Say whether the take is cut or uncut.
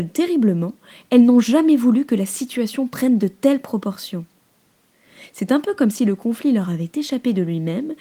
uncut